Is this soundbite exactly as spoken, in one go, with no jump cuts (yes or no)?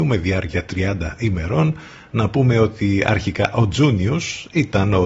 yes